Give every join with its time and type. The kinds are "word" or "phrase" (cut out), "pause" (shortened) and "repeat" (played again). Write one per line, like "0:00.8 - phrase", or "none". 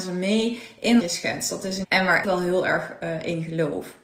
0:01.0 - phrase
0:01.8 - phrase
0:02.2 - word